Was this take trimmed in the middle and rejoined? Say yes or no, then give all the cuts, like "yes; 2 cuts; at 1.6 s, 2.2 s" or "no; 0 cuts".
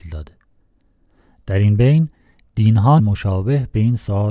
yes; 1 cut; at 3.0 s